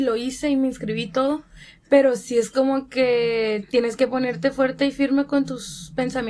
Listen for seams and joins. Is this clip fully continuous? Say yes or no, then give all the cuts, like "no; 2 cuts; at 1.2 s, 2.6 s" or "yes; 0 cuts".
yes; 0 cuts